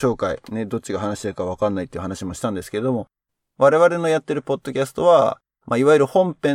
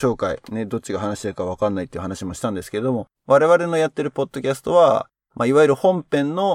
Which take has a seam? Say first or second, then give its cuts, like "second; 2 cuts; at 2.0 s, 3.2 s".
second; 1 cut; at 3.1 s